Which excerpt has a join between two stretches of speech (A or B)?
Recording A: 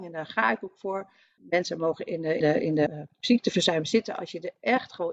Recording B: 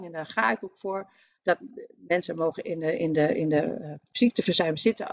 A